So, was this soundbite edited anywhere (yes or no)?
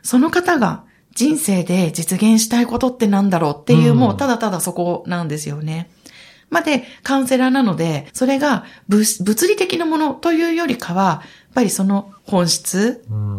yes